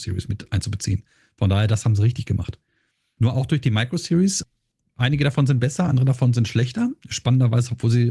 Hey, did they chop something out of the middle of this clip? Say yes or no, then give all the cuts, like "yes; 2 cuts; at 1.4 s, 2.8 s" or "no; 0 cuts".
no; 0 cuts